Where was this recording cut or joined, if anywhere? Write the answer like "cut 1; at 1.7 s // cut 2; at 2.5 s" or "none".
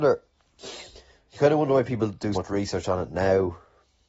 cut 1; at 2.4 s